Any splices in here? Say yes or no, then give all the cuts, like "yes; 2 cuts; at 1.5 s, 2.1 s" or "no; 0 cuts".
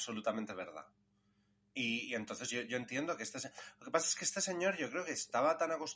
no; 0 cuts